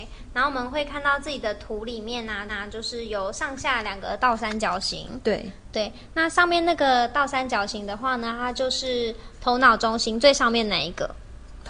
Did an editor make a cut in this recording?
yes; 1 cut; at 2.5 s

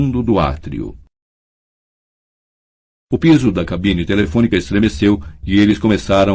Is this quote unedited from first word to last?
yes; 0 cuts

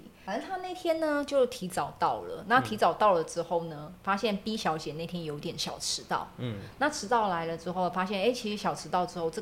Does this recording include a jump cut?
no; 0 cuts

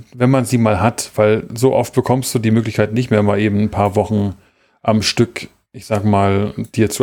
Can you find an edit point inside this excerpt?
no; 0 cuts

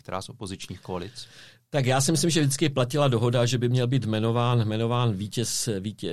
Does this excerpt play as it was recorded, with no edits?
yes; 0 cuts

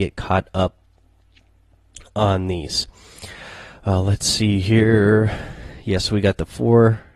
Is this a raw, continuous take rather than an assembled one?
yes; 0 cuts

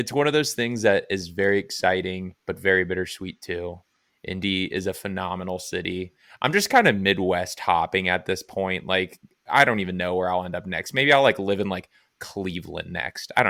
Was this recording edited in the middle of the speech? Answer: no; 0 cuts

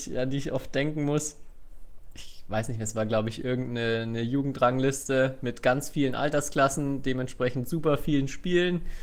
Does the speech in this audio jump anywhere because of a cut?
yes; 1 cut; at 2.1 s

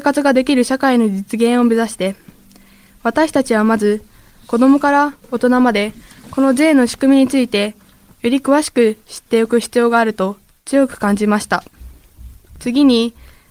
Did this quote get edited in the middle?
no; 0 cuts

